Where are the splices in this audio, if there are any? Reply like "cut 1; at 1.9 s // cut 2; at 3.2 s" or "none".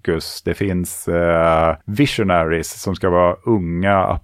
cut 1; at 1.8 s